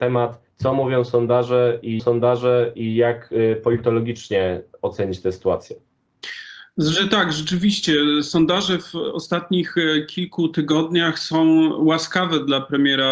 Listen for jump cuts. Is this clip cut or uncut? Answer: cut